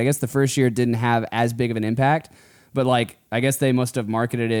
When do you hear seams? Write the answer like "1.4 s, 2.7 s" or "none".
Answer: none